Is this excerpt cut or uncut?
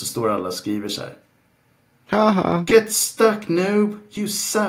uncut